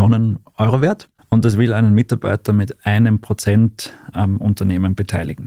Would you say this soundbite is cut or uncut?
uncut